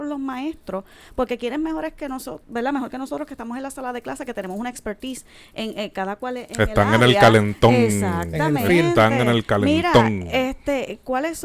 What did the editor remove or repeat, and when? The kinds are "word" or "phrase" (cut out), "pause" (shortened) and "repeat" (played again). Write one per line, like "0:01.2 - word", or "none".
none